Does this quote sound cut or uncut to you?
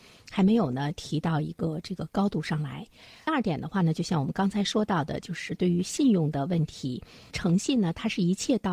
uncut